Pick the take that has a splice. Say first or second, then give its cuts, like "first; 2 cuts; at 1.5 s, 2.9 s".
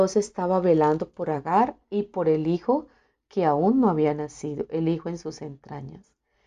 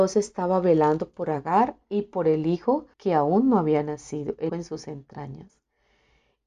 second; 2 cuts; at 2.9 s, 4.5 s